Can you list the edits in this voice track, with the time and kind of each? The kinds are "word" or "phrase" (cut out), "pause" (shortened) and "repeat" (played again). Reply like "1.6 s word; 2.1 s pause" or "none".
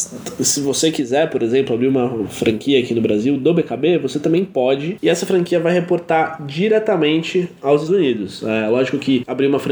7.9 s word